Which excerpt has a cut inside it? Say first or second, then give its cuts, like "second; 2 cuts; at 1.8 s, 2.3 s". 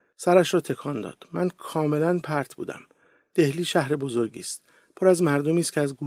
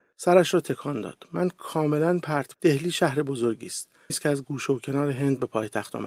second; 2 cuts; at 2.5 s, 4.1 s